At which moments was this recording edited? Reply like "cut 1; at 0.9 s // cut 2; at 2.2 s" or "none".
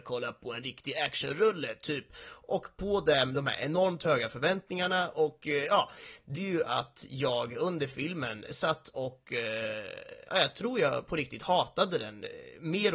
cut 1; at 6.3 s // cut 2; at 8.5 s // cut 3; at 10.3 s